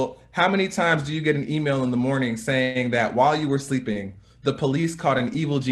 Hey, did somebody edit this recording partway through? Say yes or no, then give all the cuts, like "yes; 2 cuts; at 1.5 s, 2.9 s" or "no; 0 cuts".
no; 0 cuts